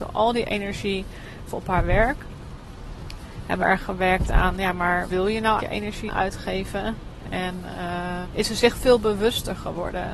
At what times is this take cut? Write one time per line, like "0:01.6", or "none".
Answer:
0:01.5
0:03.6
0:05.1
0:05.6
0:06.1
0:08.2
0:08.8